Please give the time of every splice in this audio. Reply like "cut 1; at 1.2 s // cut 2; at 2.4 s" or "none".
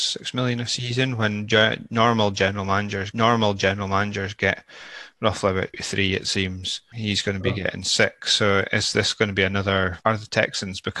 cut 1; at 3.1 s // cut 2; at 5.7 s // cut 3; at 6.9 s // cut 4; at 10.0 s